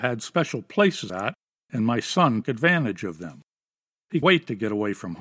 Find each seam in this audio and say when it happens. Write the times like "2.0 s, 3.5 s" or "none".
1.1 s, 2.4 s, 4.2 s